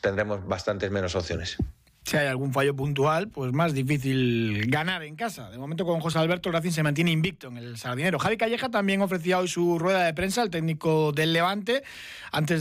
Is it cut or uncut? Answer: uncut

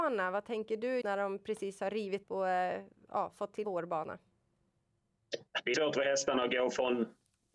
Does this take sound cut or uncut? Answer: cut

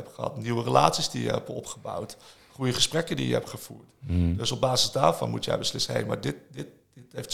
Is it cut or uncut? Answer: uncut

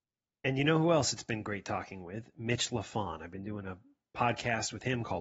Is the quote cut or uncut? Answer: uncut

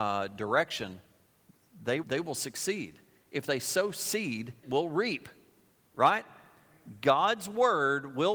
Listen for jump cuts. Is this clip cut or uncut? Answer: cut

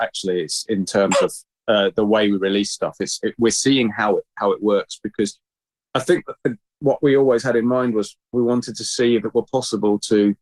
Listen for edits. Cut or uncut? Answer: uncut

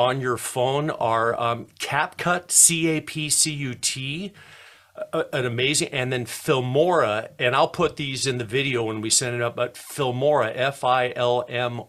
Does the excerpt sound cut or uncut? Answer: uncut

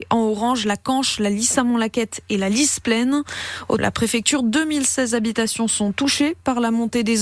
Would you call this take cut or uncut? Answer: cut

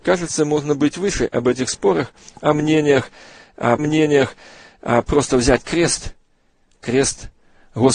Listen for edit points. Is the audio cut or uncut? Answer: cut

